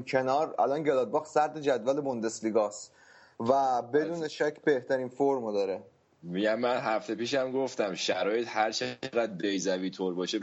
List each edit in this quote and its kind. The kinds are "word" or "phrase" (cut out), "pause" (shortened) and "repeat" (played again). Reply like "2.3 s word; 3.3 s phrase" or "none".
none